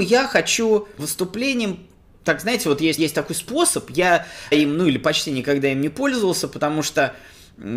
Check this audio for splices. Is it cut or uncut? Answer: cut